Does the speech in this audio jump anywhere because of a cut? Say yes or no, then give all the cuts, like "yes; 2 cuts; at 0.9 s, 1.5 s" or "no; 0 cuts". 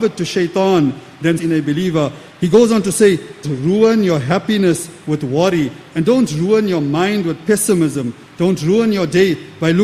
yes; 2 cuts; at 1.4 s, 3.4 s